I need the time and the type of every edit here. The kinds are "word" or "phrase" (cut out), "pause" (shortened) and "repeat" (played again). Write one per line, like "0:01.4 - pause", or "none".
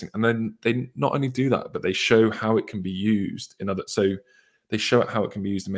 none